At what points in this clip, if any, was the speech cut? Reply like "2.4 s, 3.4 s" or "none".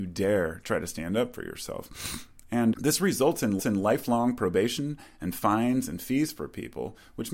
2.7 s, 3.6 s